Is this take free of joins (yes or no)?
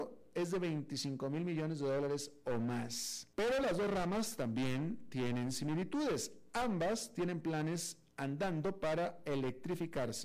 no